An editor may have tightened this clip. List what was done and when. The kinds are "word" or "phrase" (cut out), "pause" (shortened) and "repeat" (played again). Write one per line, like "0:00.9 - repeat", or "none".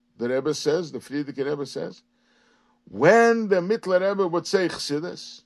none